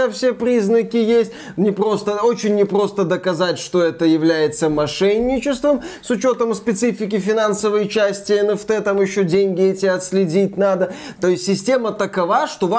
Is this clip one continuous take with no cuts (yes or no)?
yes